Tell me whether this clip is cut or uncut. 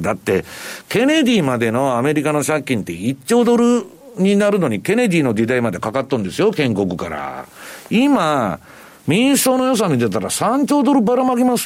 uncut